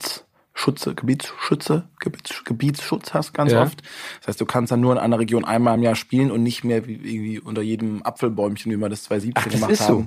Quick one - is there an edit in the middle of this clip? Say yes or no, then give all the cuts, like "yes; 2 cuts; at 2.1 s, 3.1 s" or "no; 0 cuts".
no; 0 cuts